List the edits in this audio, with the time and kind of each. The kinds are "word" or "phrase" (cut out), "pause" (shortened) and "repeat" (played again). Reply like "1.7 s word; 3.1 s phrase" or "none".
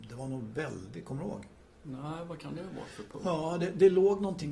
none